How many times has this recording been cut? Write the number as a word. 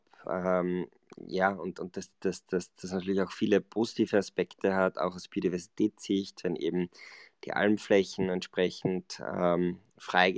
zero